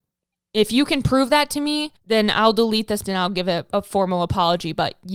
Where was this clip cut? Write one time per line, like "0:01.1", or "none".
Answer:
0:02.0
0:03.0